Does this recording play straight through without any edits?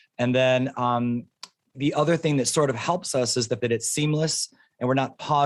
no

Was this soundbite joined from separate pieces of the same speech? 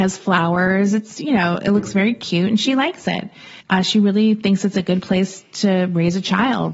yes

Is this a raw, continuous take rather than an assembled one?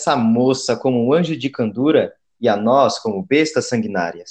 yes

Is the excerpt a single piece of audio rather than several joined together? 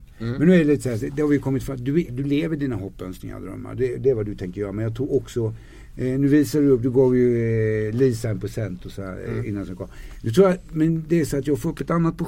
no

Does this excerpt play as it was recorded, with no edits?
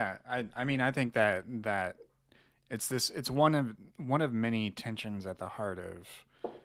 yes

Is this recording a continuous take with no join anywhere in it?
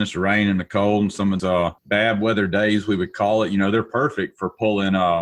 no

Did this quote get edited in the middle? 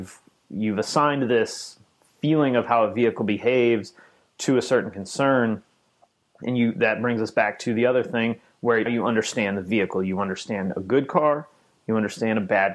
yes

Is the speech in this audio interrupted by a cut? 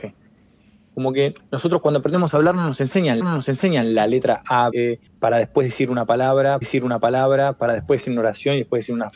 yes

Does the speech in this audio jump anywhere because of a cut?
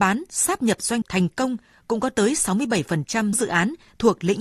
yes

